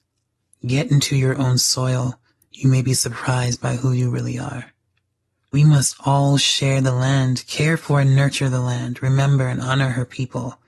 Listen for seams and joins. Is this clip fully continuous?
yes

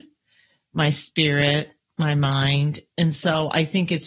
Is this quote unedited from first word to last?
yes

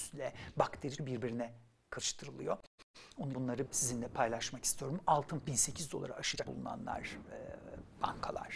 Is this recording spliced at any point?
yes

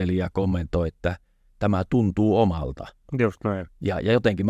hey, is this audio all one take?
yes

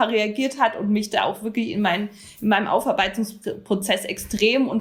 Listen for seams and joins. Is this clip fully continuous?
yes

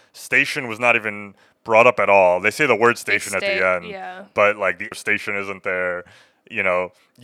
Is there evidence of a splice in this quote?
yes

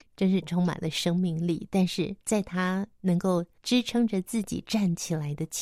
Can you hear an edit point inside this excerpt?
yes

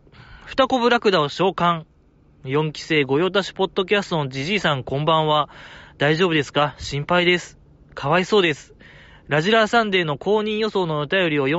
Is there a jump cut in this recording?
no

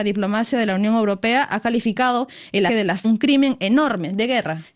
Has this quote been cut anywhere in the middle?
yes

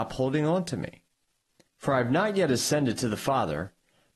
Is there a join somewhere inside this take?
no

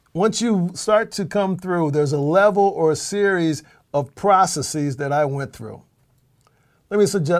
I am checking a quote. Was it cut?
no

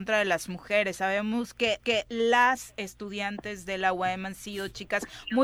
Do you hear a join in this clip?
yes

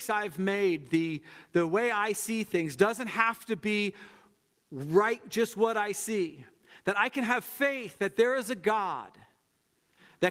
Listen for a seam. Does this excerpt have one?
no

